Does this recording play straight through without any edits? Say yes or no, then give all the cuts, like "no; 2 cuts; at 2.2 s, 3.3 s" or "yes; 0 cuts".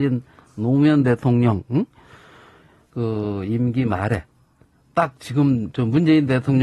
yes; 0 cuts